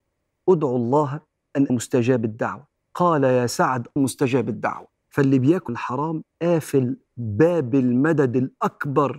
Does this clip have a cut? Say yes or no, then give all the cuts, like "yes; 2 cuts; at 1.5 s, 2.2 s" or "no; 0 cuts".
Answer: yes; 5 cuts; at 1.7 s, 2.8 s, 4.0 s, 5.0 s, 5.7 s